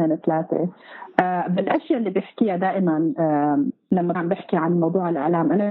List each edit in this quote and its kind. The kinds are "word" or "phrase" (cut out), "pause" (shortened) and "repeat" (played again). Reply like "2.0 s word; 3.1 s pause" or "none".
4.1 s word